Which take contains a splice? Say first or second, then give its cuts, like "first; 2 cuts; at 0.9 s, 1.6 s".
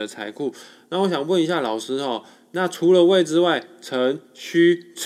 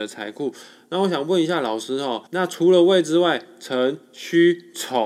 second; 1 cut; at 2.3 s